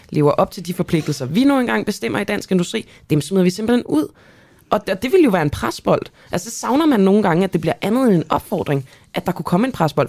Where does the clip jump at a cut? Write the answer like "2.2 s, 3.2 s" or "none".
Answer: none